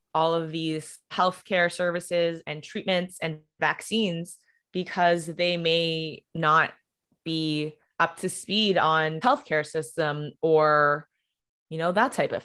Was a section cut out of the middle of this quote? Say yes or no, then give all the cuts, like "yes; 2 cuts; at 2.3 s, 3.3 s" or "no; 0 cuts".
yes; 4 cuts; at 1.1 s, 6.3 s, 7.8 s, 9.2 s